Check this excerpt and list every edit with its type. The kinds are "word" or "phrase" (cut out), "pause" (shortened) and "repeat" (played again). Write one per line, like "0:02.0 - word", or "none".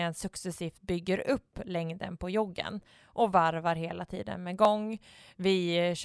none